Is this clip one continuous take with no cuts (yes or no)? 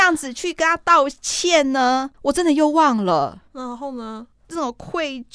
no